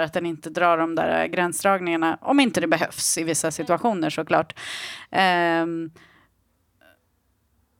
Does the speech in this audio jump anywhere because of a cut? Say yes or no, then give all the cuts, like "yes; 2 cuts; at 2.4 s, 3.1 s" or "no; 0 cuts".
no; 0 cuts